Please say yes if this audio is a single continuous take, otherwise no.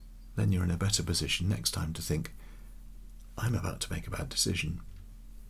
yes